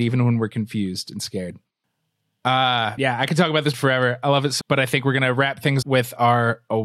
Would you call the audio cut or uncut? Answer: cut